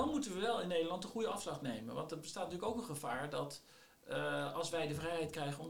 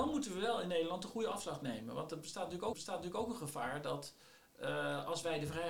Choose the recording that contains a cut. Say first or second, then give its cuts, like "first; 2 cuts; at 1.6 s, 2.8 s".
second; 1 cut; at 2.7 s